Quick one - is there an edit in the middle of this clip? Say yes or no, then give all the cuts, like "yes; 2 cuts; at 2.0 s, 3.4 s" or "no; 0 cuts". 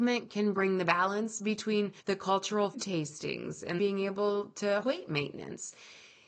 yes; 4 cuts; at 2.0 s, 2.7 s, 3.8 s, 4.8 s